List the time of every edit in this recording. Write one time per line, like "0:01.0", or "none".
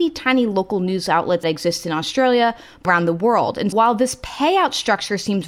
0:01.4
0:02.9
0:03.7

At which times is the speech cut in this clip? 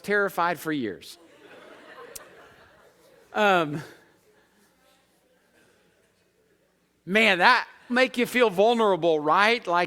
0:07.9

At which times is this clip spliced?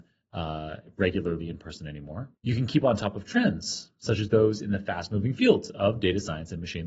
0:02.3

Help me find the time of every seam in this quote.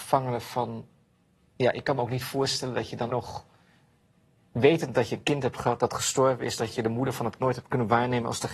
0:03.1
0:07.4

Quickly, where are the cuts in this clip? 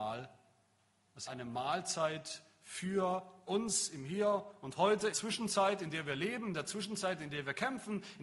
0:01.3
0:03.5
0:05.1

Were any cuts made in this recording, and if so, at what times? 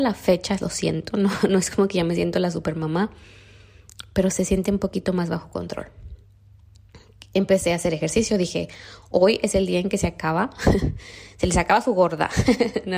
none

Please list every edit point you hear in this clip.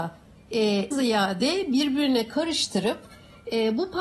0:00.9

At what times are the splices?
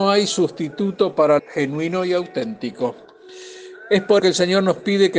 0:01.4
0:04.2

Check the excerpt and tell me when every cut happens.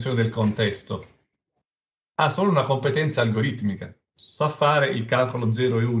none

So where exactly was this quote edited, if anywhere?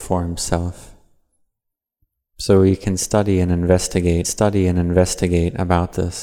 0:04.2

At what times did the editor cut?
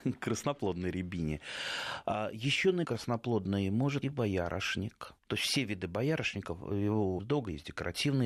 0:02.8
0:04.0
0:05.2
0:07.2

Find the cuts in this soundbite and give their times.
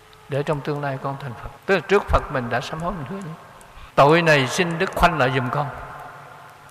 0:01.6
0:03.9
0:04.9

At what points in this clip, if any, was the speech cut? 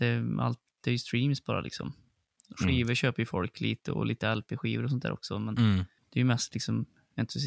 0:06.0

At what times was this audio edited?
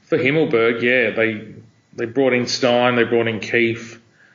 none

